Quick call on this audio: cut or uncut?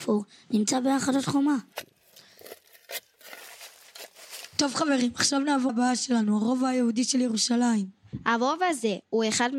cut